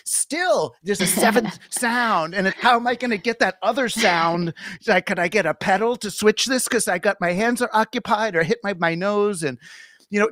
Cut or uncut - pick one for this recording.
cut